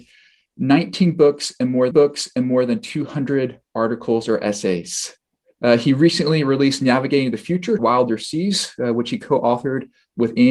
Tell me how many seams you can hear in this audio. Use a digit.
2